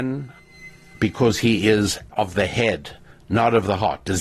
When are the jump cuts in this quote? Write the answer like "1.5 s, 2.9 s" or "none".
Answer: 2.1 s